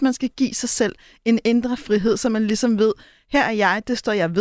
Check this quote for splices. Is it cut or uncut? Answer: uncut